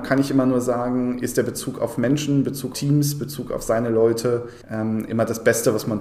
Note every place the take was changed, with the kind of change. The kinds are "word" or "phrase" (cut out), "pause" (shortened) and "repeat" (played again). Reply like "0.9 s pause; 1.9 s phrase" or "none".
2.7 s word; 4.6 s pause